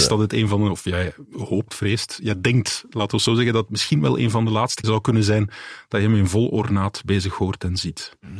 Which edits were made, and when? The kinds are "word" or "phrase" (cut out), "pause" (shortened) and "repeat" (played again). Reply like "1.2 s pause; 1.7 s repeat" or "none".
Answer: 4.8 s word